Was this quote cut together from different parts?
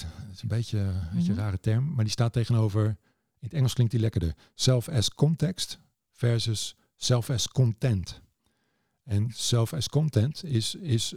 no; 0 cuts

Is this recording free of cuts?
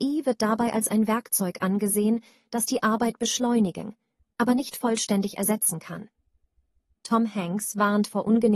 yes; 0 cuts

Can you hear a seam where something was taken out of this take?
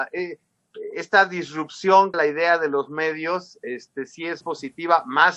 yes; 2 cuts; at 2.1 s, 4.4 s

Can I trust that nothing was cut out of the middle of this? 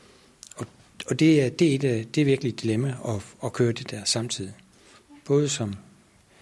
yes; 0 cuts

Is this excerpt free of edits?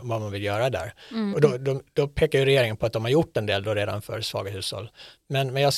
yes; 0 cuts

